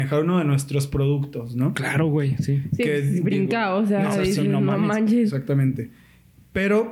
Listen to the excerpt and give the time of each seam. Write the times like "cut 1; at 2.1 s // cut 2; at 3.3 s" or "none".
none

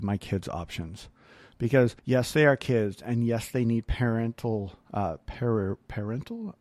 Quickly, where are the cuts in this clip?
cut 1; at 2.0 s // cut 2; at 4.8 s

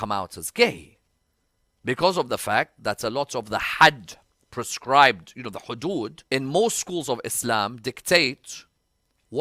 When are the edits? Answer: cut 1; at 6.3 s

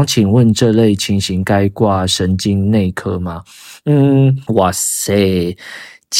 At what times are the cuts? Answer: cut 1; at 4.5 s

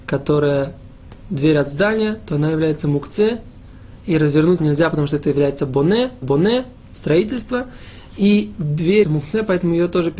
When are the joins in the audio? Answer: cut 1; at 4.6 s // cut 2; at 6.2 s // cut 3; at 9.0 s

